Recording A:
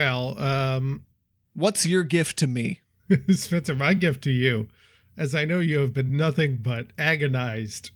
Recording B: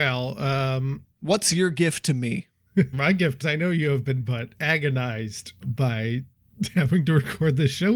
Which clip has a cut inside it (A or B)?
B